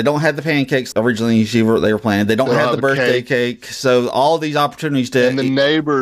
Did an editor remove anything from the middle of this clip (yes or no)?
yes